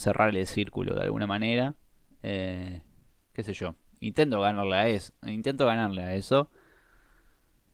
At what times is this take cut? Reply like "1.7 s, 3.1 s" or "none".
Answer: none